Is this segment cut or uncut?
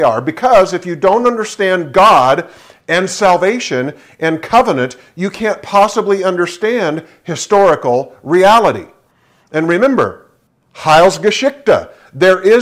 uncut